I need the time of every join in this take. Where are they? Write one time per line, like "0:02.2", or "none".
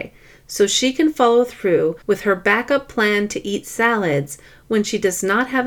0:02.0